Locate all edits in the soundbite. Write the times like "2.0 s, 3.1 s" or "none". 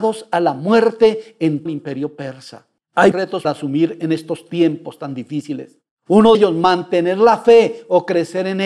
1.7 s, 3.1 s, 3.4 s, 6.3 s